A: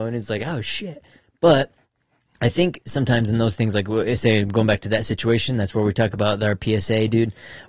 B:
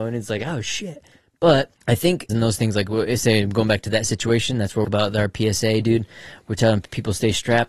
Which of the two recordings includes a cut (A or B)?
B